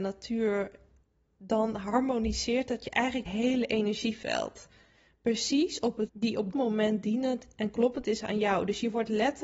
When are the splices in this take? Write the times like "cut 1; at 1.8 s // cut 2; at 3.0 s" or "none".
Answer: cut 1; at 1.3 s // cut 2; at 3.3 s // cut 3; at 6.1 s // cut 4; at 6.5 s